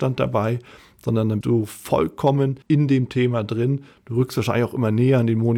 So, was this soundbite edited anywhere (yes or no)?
yes